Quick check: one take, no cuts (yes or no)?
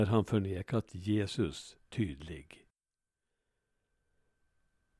no